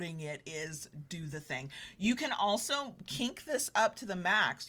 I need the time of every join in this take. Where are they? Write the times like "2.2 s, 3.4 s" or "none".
none